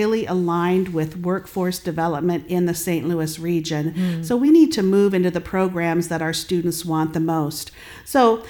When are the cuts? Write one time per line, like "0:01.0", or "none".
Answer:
none